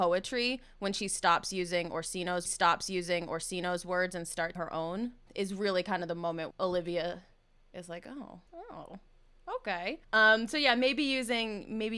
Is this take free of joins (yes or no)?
no